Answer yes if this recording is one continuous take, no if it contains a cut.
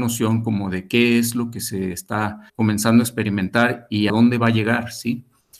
no